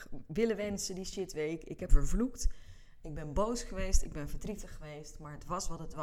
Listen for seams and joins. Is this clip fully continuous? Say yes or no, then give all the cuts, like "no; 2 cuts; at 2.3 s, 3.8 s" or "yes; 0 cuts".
no; 1 cut; at 1.9 s